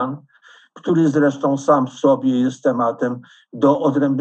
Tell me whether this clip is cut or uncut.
uncut